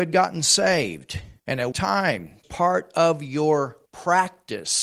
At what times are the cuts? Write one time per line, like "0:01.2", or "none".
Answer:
0:01.4
0:01.7
0:02.4
0:03.9